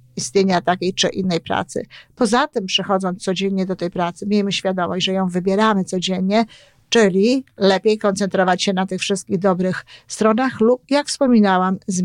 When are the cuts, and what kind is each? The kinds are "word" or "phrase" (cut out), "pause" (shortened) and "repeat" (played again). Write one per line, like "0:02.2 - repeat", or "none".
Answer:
none